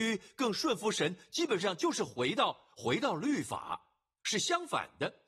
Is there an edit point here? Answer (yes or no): no